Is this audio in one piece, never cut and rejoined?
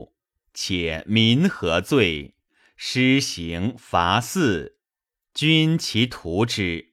yes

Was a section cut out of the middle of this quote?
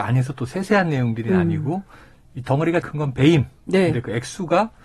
yes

